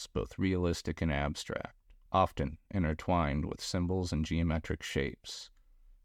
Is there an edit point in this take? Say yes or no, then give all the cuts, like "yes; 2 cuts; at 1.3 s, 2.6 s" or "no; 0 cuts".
no; 0 cuts